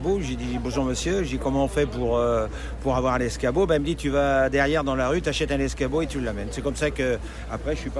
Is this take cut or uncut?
uncut